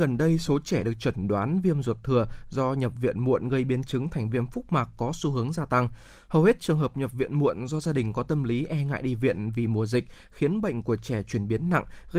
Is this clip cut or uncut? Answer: uncut